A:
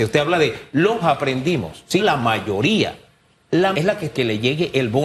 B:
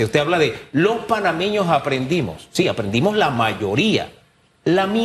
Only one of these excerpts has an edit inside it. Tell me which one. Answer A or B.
A